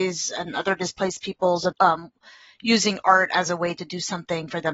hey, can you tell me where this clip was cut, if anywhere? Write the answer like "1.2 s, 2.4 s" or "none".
1.7 s